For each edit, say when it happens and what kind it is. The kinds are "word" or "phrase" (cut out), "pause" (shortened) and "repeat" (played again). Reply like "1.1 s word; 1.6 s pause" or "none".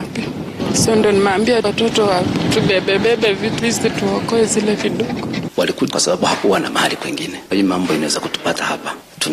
1.6 s word; 3.6 s word; 4.8 s word; 5.9 s word; 7.5 s word